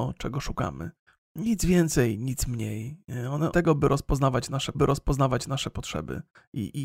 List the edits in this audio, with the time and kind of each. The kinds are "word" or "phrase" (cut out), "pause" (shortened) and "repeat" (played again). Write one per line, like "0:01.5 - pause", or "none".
0:01.1 - pause
0:03.5 - phrase
0:04.7 - repeat